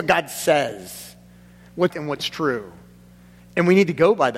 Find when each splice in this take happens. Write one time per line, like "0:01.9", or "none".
0:01.9